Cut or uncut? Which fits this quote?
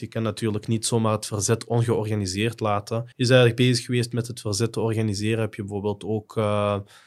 cut